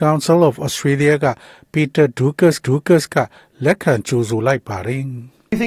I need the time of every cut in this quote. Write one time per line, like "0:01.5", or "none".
0:02.6